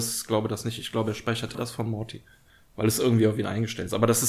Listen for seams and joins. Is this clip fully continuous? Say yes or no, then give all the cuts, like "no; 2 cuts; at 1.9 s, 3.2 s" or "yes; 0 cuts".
no; 1 cut; at 1.5 s